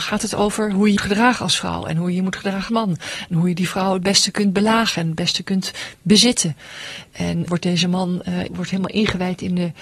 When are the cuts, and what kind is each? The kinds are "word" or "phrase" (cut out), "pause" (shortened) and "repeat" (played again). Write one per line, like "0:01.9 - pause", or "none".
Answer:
0:01.0 - word
0:02.7 - word
0:07.5 - word
0:08.5 - word